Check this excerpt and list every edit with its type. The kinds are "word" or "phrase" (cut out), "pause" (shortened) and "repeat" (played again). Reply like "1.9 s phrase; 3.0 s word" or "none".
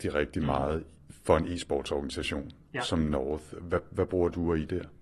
none